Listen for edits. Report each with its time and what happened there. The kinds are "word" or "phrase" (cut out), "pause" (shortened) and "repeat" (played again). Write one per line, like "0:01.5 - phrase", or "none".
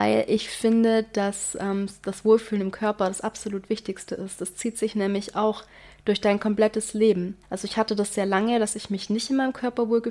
0:07.4 - pause

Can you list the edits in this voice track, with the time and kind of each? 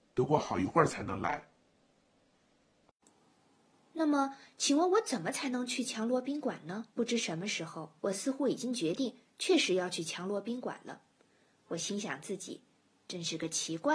0:06.9 - pause
0:08.0 - pause

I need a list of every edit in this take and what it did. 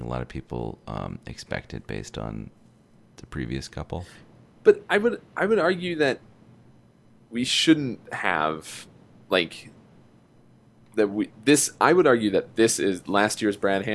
none

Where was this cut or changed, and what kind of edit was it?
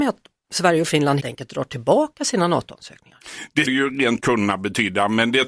0:01.2 - word
0:03.6 - word
0:04.2 - word

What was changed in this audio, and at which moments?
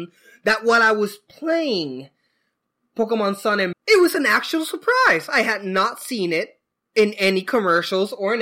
0:03.7 - word

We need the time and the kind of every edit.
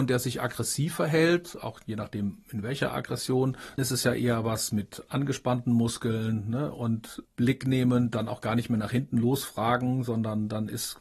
0:03.8 - word
0:07.3 - word

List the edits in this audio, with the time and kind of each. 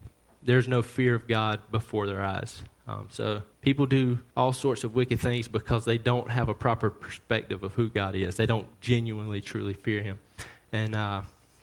0:02.8 - pause
0:03.5 - pause
0:04.3 - pause
0:08.7 - pause

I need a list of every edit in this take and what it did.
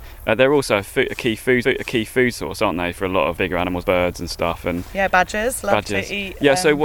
0:01.6 - repeat
0:03.4 - word
0:03.8 - word

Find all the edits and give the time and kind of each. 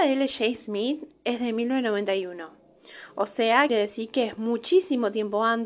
0:03.7 - word

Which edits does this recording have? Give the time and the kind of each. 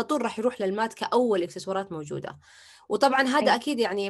none

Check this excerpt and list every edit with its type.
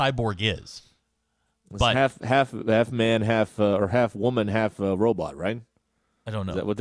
none

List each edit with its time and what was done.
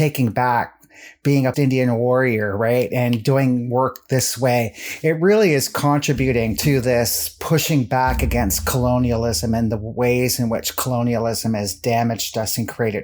0:01.5 - word
0:06.6 - word

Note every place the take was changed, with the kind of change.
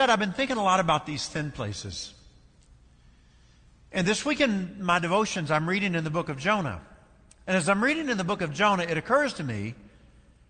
none

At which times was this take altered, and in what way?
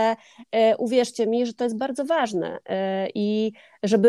none

